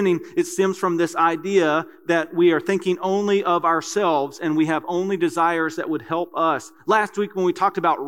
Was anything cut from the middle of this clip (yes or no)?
no